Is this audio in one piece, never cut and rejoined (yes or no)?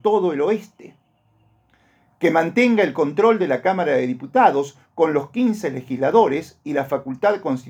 yes